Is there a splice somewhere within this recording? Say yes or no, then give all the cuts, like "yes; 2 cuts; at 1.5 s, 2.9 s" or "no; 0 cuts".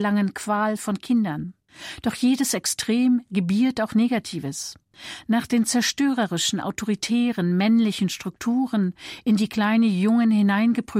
no; 0 cuts